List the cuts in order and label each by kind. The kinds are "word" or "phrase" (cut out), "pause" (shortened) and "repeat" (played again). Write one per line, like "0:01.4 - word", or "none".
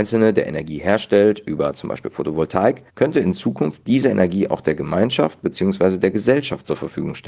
0:02.9 - pause